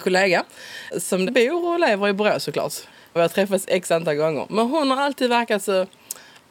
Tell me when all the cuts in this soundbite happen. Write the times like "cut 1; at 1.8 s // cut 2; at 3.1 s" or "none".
cut 1; at 1.3 s // cut 2; at 3.0 s